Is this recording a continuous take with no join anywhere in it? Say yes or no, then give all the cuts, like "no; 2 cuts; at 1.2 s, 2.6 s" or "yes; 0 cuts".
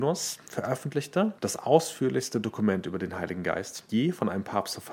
no; 2 cuts; at 1.4 s, 3.9 s